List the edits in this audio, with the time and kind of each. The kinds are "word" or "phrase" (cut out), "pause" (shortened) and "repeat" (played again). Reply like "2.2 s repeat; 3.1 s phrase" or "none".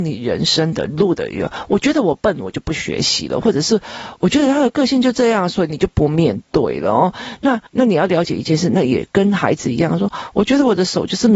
7.7 s pause